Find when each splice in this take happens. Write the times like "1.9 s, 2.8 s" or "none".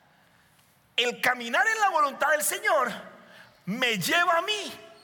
none